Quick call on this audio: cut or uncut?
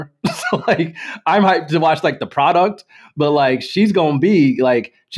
uncut